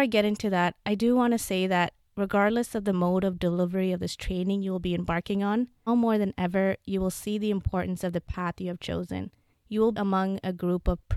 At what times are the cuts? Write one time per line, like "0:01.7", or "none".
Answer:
0:05.9
0:09.5
0:09.9